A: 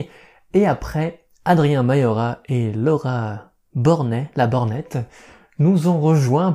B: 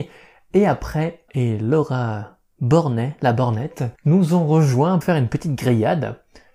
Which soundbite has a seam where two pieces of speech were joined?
B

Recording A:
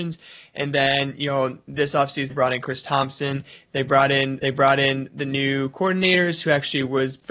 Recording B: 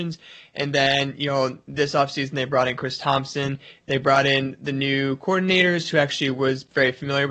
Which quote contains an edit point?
A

